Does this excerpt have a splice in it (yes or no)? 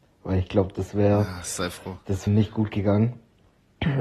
yes